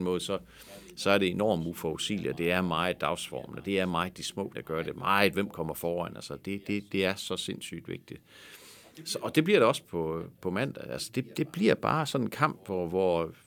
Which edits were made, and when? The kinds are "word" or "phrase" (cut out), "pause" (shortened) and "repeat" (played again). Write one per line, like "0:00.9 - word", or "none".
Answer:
0:04.5 - word